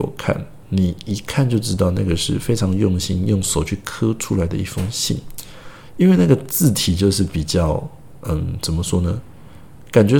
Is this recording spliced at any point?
no; 0 cuts

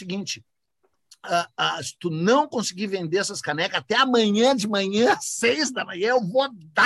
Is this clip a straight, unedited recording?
yes; 0 cuts

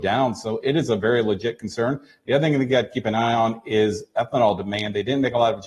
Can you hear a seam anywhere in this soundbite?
no; 0 cuts

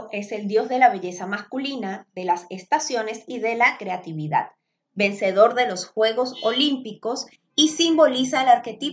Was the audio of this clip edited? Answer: no; 0 cuts

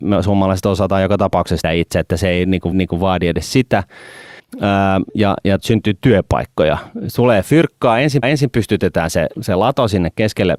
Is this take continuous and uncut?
no; 6 cuts; at 1.6 s, 2.7 s, 4.4 s, 5.6 s, 8.2 s, 9.3 s

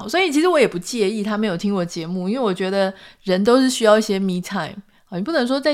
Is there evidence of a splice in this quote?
no; 0 cuts

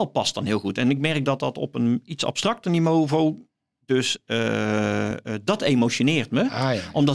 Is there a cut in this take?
no; 0 cuts

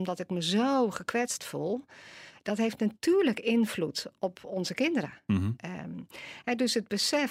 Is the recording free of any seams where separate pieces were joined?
yes; 0 cuts

